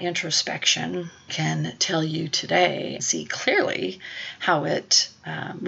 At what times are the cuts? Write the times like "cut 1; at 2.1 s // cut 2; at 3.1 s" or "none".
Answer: cut 1; at 1.3 s // cut 2; at 3.0 s